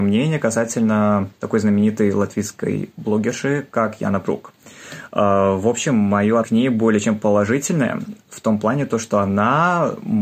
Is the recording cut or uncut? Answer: cut